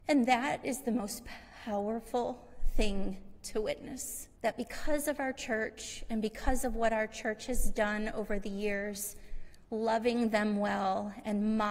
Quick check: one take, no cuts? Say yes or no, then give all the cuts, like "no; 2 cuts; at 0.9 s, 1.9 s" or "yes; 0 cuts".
no; 1 cut; at 4.4 s